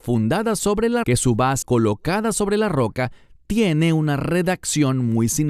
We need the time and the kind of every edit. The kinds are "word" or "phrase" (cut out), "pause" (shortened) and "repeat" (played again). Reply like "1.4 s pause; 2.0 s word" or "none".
1.0 s word; 1.6 s word